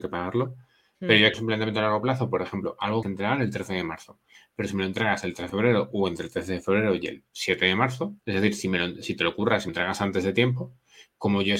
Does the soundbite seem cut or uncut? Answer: cut